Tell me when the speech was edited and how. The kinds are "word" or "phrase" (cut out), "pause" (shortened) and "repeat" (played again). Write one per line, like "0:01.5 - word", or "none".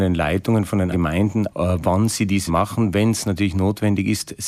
0:00.9 - word
0:01.5 - word
0:02.5 - word